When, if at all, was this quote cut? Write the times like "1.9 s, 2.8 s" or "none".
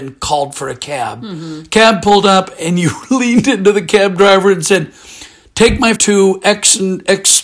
6.0 s